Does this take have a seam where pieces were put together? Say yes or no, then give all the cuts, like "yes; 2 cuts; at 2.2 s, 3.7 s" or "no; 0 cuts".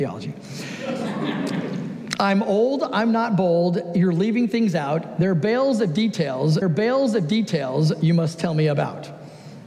yes; 1 cut; at 6.6 s